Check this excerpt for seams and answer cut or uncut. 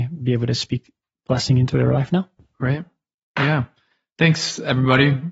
uncut